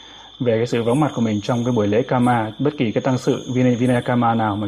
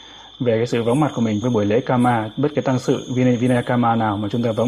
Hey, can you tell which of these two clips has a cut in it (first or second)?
second